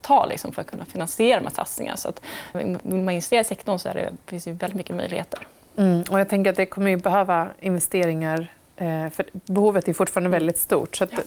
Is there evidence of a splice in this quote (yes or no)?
yes